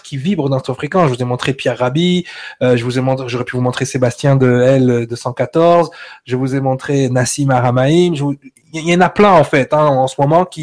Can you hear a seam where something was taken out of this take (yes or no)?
no